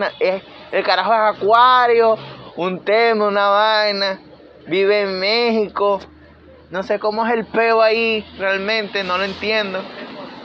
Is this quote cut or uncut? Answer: uncut